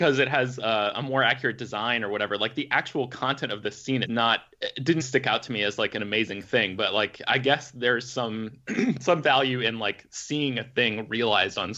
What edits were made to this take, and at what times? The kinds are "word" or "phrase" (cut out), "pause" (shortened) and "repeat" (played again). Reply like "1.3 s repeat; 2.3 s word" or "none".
4.0 s phrase; 5.0 s word

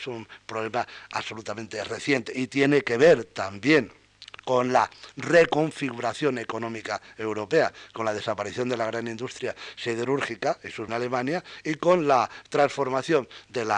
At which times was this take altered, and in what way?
10.9 s phrase

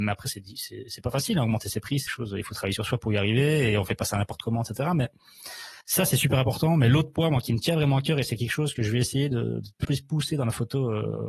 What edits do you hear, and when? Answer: 2.1 s word; 5.8 s pause; 9.8 s word

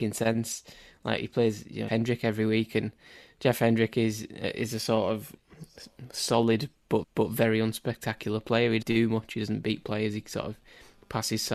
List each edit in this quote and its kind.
1.9 s phrase; 7.0 s repeat; 8.8 s phrase

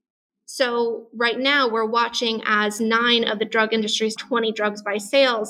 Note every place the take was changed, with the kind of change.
4.2 s word

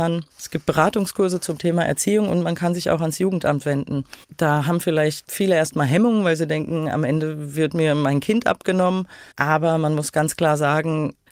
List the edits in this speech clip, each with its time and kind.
9.3 s pause

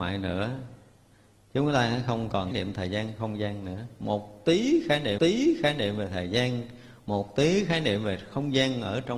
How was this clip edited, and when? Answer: 2.5 s phrase; 5.2 s repeat

